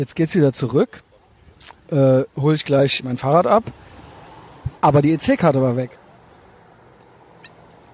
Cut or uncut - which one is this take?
cut